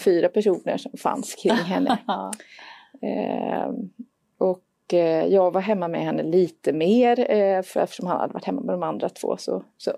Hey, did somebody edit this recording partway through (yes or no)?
no